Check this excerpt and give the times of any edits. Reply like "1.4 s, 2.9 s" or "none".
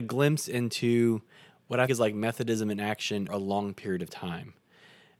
1.9 s, 3.3 s